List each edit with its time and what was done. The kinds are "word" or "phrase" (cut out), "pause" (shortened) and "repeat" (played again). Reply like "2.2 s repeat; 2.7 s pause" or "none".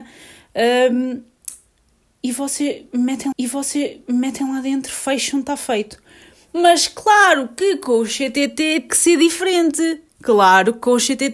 3.3 s repeat; 8.9 s word; 10.1 s pause